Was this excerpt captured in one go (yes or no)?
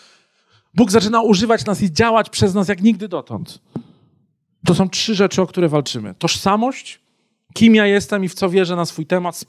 yes